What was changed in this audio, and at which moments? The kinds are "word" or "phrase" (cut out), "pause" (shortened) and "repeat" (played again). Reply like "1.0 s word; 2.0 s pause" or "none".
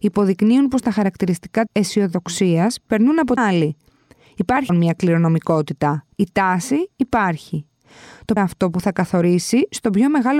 1.7 s word; 3.4 s phrase; 4.7 s word; 6.1 s pause; 8.4 s phrase